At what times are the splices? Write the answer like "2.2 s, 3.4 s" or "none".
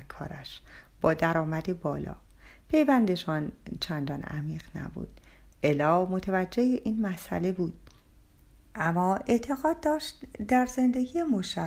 none